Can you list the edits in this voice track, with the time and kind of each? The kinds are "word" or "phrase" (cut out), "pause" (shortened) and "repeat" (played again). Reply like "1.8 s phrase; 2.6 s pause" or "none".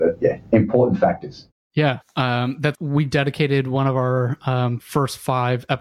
2.0 s word; 2.7 s word